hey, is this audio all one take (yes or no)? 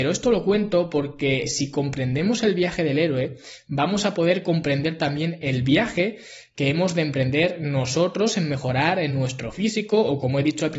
yes